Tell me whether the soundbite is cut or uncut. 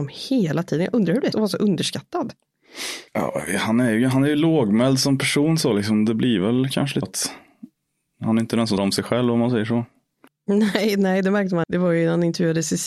cut